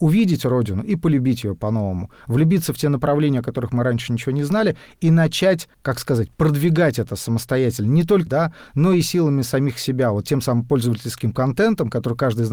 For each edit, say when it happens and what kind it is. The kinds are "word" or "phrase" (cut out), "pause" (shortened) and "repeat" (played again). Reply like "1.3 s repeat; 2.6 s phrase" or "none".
5.7 s pause; 8.3 s phrase